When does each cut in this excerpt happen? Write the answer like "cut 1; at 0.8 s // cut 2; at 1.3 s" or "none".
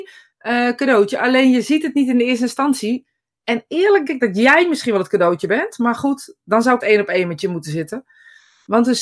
cut 1; at 4.1 s // cut 2; at 6.8 s